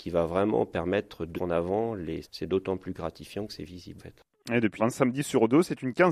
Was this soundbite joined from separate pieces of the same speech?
yes; 4 cuts; at 1.4 s, 2.2 s, 4.0 s, 4.8 s

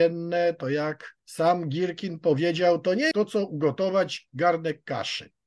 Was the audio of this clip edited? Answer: yes; 2 cuts; at 1.2 s, 3.1 s

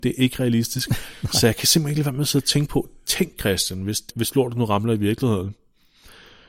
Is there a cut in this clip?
yes; 1 cut; at 4.1 s

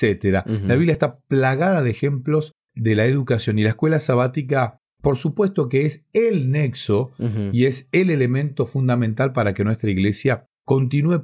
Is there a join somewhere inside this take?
no; 0 cuts

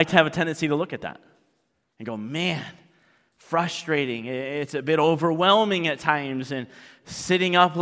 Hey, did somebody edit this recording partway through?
no; 0 cuts

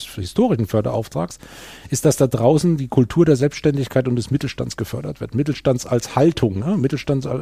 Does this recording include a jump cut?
no; 0 cuts

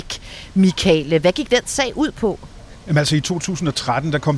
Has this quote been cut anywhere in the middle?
no; 0 cuts

